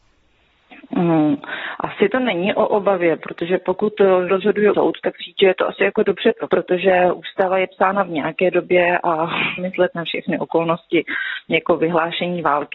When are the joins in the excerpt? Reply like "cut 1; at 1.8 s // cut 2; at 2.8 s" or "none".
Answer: cut 1; at 4.3 s // cut 2; at 4.7 s // cut 3; at 5.2 s // cut 4; at 6.5 s // cut 5; at 9.6 s

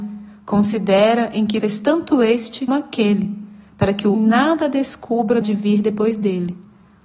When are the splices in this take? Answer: cut 1; at 1.6 s // cut 2; at 2.7 s // cut 3; at 4.1 s // cut 4; at 5.4 s

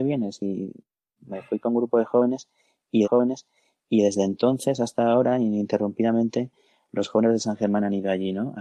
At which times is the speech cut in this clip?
cut 1; at 3.0 s

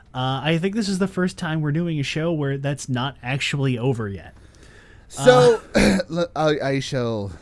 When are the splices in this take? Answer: none

